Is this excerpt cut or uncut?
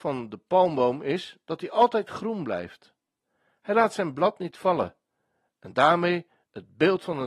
uncut